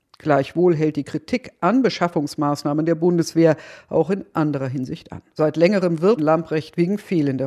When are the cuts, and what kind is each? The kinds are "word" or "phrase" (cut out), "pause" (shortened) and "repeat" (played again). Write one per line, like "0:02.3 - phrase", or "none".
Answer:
0:05.3 - pause
0:06.2 - word